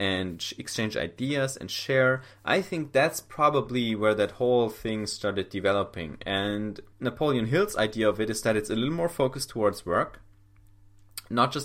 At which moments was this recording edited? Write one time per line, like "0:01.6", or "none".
0:06.9